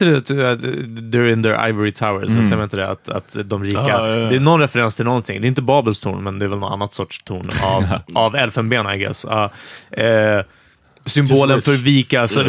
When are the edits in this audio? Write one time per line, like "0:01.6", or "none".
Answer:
none